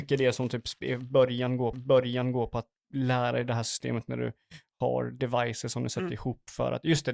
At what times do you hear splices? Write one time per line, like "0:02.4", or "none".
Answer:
0:01.7